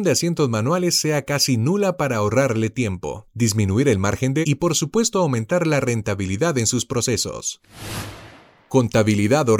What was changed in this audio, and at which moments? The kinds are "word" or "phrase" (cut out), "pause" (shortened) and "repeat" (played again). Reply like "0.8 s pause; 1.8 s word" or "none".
4.4 s word

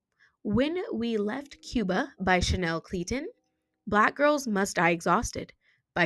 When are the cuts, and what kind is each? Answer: none

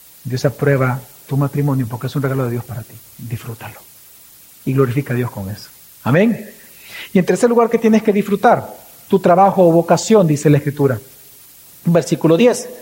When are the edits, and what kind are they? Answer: none

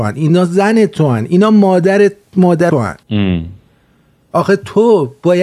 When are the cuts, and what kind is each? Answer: 2.7 s phrase; 3.0 s pause

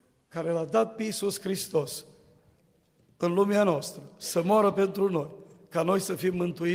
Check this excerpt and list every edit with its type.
none

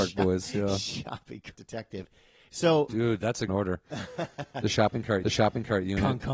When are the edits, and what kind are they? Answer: 1.5 s word; 2.9 s word; 3.5 s phrase; 5.2 s repeat

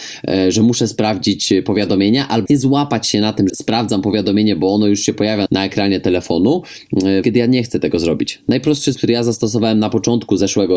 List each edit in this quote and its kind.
2.5 s word; 3.5 s word; 5.5 s word; 7.2 s word; 9.0 s word

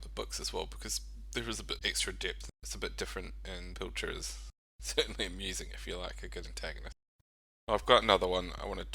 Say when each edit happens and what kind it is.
none

